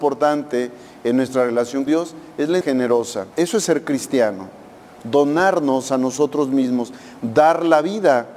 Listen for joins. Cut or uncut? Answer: cut